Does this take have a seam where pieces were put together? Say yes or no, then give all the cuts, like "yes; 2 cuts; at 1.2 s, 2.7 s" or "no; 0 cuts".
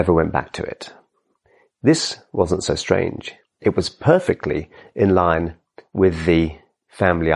no; 0 cuts